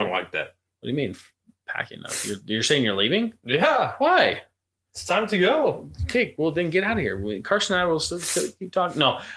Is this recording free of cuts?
yes; 0 cuts

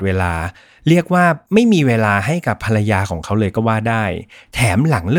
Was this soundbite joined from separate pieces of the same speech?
no; 0 cuts

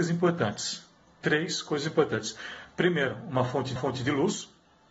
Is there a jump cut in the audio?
yes; 1 cut; at 3.8 s

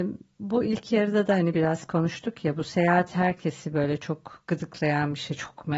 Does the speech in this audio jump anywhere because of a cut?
no; 0 cuts

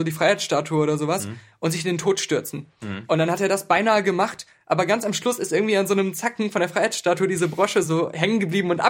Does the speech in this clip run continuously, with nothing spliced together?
yes; 0 cuts

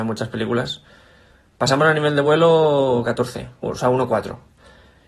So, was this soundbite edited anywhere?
no; 0 cuts

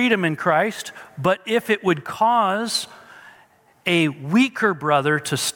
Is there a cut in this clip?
no; 0 cuts

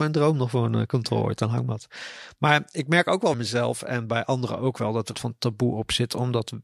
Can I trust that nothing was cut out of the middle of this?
no; 2 cuts; at 3.3 s, 5.1 s

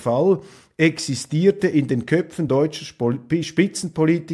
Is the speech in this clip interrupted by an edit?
no; 0 cuts

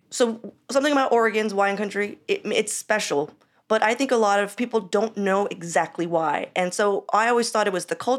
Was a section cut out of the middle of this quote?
no; 0 cuts

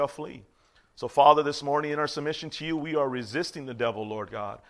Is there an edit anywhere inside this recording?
no; 0 cuts

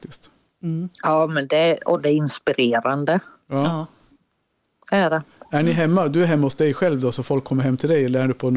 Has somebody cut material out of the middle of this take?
no; 0 cuts

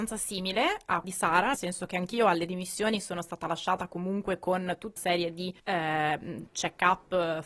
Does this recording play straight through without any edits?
no; 4 cuts; at 1.0 s, 1.5 s, 5.0 s, 5.6 s

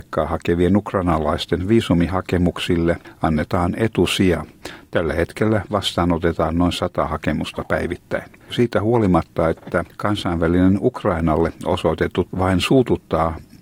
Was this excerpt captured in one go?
no; 2 cuts; at 8.4 s, 12.3 s

